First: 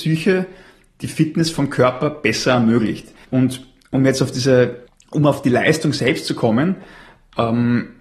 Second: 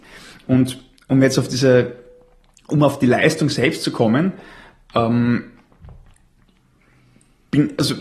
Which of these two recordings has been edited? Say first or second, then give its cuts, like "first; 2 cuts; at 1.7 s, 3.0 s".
first; 2 cuts; at 3.2 s, 4.9 s